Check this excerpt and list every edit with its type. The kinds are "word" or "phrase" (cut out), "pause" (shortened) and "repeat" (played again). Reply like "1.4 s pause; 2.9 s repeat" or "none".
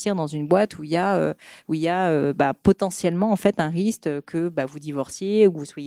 none